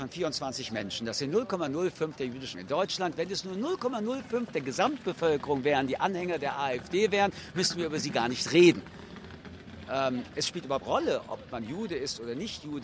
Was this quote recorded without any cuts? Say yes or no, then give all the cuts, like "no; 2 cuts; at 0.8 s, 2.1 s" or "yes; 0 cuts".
no; 4 cuts; at 2.2 s, 2.5 s, 4.5 s, 10.8 s